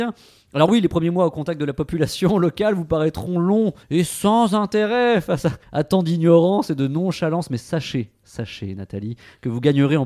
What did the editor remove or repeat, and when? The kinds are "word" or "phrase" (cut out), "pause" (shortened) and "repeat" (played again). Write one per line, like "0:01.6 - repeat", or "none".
0:03.8 - pause
0:05.6 - pause

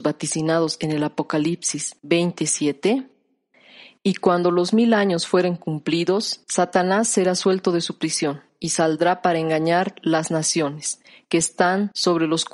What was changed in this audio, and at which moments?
0:06.4 - pause

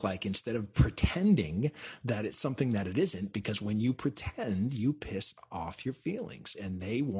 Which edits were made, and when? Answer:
none

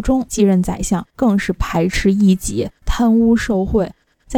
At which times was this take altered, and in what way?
0:01.1 - pause

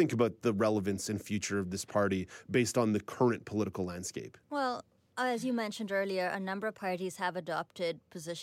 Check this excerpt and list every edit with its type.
none

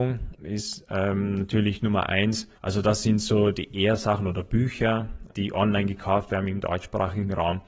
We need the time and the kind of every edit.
0:02.5 - pause
0:05.3 - word

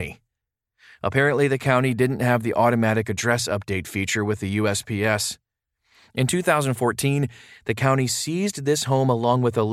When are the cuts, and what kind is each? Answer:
none

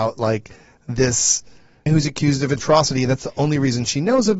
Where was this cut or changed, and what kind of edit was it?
0:01.9 - word
0:02.6 - word

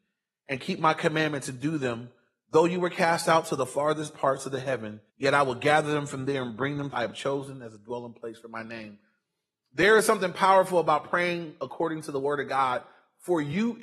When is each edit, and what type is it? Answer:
0:05.1 - pause
0:06.9 - phrase

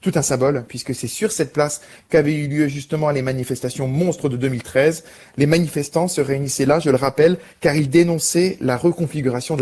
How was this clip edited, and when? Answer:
none

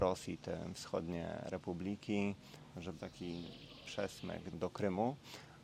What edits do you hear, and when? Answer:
0:03.0 - word
0:04.5 - word

